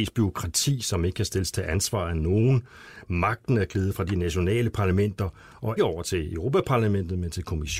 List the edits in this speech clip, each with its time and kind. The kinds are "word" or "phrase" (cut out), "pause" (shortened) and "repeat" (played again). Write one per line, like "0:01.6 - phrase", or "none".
0:05.8 - word